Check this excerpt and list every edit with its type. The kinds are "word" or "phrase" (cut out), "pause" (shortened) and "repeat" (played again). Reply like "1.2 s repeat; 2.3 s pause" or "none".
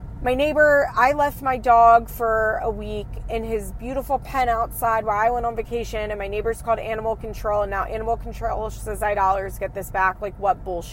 9.1 s phrase